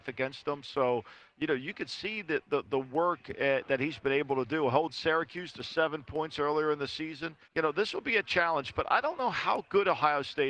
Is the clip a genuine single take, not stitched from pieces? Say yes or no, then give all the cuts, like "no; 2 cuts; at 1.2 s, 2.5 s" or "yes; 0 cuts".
no; 1 cut; at 7.4 s